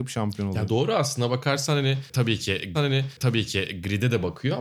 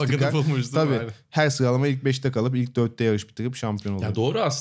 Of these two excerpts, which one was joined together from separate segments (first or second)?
first